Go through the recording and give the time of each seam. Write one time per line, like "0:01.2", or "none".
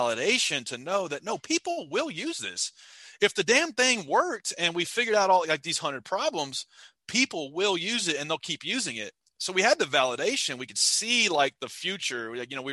none